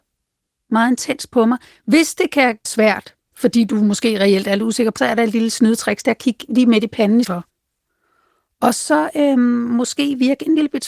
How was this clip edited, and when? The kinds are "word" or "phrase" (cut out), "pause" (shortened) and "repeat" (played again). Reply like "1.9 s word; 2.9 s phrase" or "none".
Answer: 2.7 s word; 5.0 s word; 7.2 s word